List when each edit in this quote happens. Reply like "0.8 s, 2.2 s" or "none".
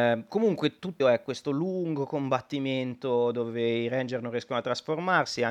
1.0 s